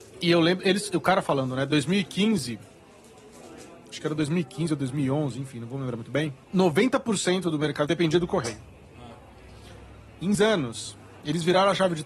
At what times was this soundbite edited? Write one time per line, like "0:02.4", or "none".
0:06.4
0:07.9
0:10.3